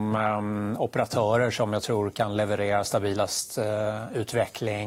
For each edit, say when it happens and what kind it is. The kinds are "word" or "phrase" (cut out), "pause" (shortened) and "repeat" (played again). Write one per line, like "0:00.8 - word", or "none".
none